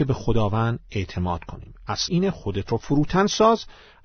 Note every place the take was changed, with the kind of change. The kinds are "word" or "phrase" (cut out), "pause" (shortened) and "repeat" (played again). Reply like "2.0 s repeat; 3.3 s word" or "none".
2.1 s word